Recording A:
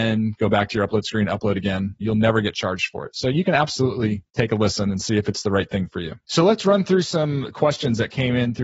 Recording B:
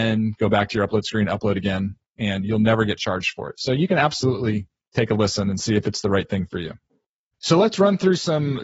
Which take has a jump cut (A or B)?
A